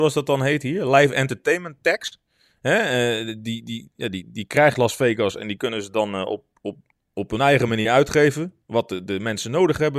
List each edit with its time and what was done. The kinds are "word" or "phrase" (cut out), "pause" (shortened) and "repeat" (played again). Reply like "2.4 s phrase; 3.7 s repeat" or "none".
none